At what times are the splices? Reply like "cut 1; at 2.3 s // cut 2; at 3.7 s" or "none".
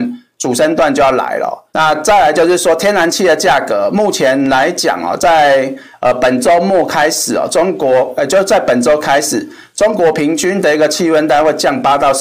cut 1; at 1.7 s